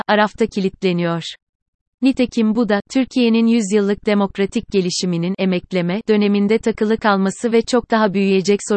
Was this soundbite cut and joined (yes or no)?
no